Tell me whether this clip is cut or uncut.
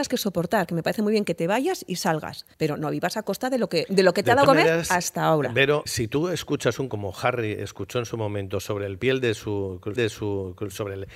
cut